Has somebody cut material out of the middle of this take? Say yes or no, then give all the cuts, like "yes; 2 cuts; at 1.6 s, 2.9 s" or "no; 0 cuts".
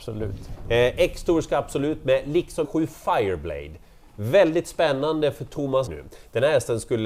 yes; 2 cuts; at 2.6 s, 5.9 s